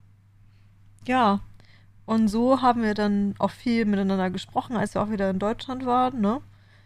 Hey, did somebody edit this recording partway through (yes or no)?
no